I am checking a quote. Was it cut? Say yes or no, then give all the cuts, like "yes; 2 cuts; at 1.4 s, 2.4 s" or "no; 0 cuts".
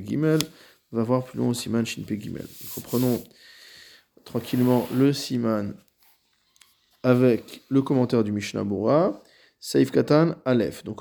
no; 0 cuts